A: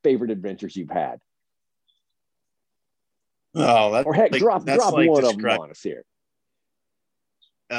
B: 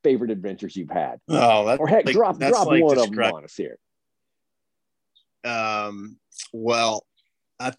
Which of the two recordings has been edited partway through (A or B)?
B